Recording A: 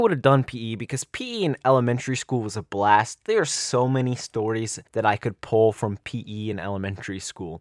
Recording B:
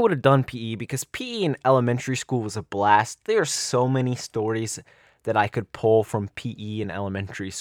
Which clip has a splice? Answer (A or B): A